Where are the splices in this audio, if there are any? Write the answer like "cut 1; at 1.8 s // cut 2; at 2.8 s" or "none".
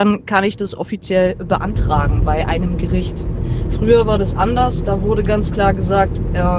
none